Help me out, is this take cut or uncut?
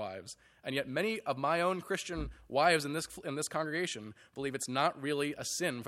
uncut